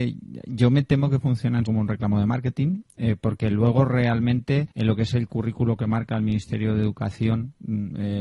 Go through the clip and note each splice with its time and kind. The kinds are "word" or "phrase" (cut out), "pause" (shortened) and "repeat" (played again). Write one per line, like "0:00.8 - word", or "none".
0:01.7 - word
0:04.7 - pause

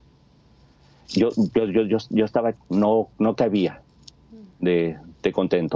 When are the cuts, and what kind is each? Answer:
0:02.6 - word

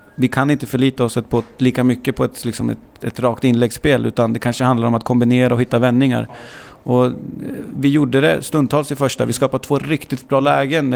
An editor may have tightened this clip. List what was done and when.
none

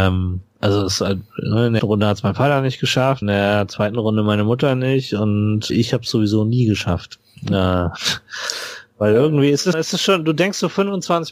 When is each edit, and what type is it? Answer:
0:01.8 - word
0:03.2 - word
0:05.7 - word
0:09.7 - word

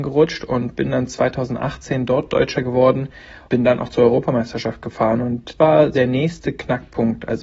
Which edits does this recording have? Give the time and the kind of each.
0:02.5 - word
0:03.5 - word
0:05.6 - word
0:05.9 - word

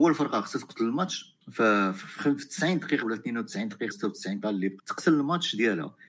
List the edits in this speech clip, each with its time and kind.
0:01.4 - pause
0:03.0 - word
0:03.9 - word
0:04.4 - word
0:04.8 - word

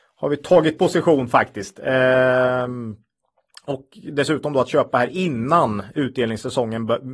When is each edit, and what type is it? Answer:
none

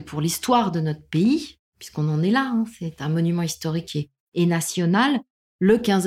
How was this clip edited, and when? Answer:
0:01.7 - pause

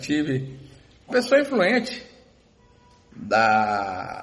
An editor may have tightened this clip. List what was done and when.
0:01.1 - word

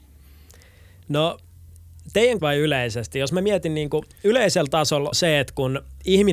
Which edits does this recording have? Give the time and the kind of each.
0:02.4 - word
0:05.1 - phrase

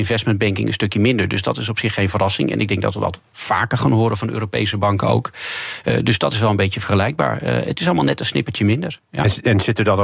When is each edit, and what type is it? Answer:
none

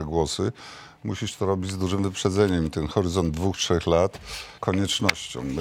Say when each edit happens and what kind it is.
0:04.6 - word

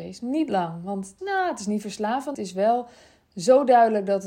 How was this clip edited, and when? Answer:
0:01.2 - word
0:02.3 - phrase

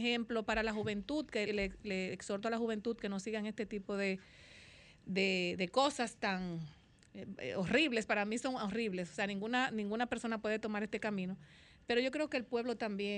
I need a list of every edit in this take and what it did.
0:01.5 - word

